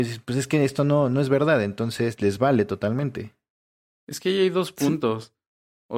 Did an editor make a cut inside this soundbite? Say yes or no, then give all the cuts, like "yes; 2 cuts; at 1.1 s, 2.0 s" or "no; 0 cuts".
no; 0 cuts